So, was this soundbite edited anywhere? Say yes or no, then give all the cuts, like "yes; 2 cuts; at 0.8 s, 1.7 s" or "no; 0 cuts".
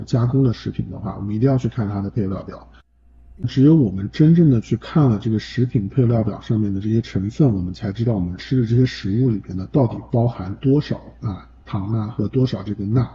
yes; 1 cut; at 3.4 s